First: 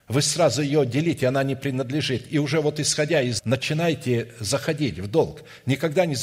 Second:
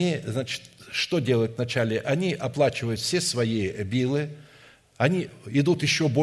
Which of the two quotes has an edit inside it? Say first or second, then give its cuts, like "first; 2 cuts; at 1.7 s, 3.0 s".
first; 1 cut; at 3.4 s